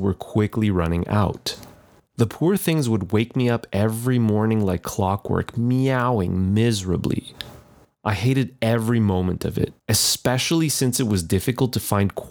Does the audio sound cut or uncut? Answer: uncut